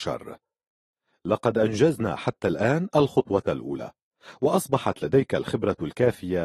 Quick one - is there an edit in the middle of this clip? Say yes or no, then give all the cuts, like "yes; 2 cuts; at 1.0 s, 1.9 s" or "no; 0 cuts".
no; 0 cuts